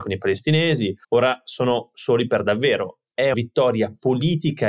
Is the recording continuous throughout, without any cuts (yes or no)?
no